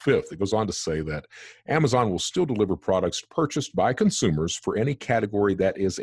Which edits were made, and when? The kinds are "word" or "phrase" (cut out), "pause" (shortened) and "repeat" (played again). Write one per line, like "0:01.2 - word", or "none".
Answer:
none